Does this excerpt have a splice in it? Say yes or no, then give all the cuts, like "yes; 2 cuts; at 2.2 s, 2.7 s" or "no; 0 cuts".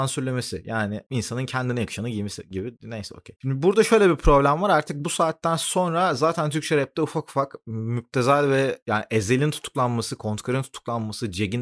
no; 0 cuts